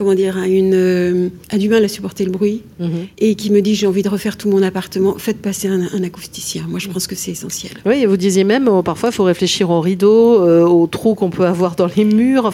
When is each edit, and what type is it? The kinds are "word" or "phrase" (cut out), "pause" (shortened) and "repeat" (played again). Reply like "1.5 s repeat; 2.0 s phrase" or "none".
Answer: 1.4 s pause; 3.1 s pause